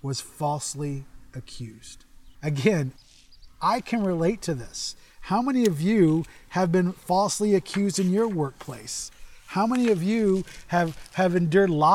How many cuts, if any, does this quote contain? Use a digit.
1